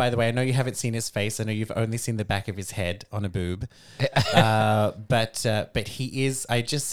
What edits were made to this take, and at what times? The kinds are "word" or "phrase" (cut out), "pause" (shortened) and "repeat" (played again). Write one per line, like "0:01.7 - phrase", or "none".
none